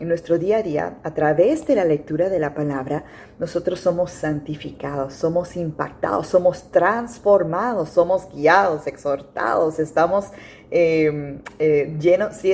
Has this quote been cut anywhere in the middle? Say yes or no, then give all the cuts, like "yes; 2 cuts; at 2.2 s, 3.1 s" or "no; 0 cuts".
no; 0 cuts